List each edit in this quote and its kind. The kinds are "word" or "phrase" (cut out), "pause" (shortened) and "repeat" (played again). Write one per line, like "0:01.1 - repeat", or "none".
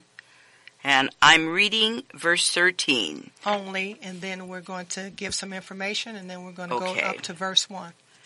0:03.4 - pause